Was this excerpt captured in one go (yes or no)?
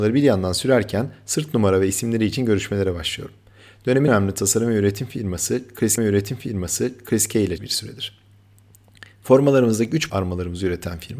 no